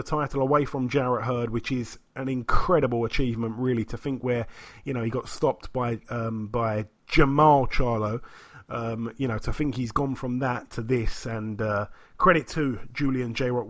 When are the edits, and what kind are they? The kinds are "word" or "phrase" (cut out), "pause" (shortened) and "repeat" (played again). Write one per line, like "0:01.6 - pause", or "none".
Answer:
none